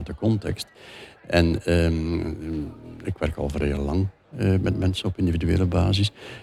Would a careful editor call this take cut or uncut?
uncut